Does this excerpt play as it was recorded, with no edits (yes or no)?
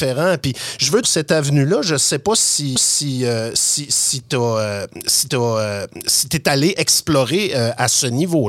no